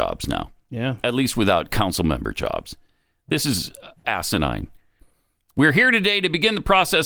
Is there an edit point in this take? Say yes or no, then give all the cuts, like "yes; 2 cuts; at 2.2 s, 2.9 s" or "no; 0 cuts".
yes; 1 cut; at 4.0 s